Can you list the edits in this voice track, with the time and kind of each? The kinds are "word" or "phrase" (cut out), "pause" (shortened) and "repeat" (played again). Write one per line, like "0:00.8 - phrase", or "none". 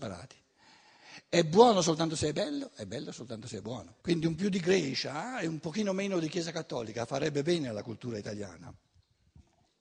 0:04.0 - pause
0:04.4 - word

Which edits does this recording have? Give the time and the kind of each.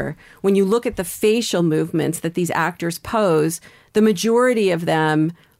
none

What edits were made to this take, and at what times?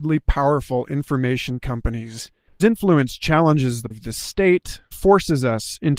0:01.6 - word
0:02.6 - word
0:03.9 - word
0:04.9 - word

